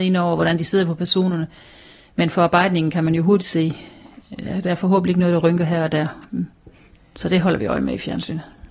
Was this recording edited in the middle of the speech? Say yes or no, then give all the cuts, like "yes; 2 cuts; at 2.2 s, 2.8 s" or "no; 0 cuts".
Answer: no; 0 cuts